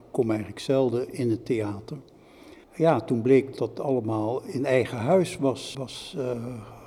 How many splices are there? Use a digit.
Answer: 3